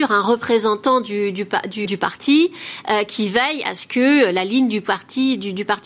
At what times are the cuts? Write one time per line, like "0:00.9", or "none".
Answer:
0:01.9